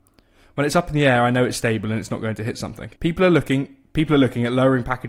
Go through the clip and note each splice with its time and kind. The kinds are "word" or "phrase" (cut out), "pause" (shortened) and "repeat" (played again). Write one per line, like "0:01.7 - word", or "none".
0:03.0 - pause